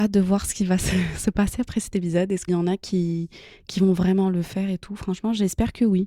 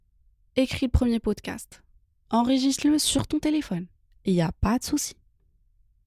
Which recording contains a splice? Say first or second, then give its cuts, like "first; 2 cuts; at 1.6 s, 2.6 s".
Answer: first; 1 cut; at 2.5 s